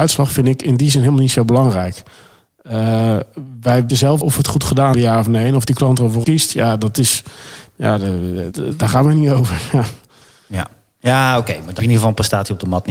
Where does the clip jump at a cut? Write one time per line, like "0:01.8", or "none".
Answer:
0:03.9
0:04.2
0:04.9
0:06.2
0:08.5
0:11.8